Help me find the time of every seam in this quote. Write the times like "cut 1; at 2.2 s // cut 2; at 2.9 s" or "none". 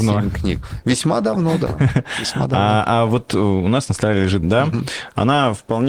cut 1; at 4.4 s